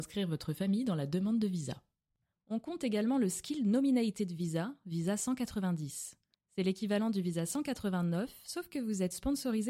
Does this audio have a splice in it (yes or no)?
no